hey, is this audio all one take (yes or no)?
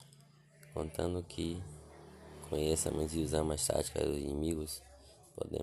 yes